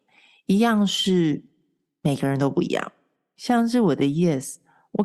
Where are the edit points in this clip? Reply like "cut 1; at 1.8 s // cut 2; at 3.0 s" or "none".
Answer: none